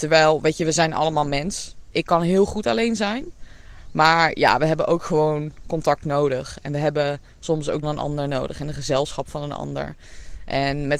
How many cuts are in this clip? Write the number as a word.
one